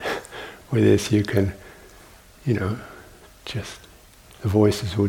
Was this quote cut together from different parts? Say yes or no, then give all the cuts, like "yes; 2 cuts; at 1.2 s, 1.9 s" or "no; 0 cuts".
no; 0 cuts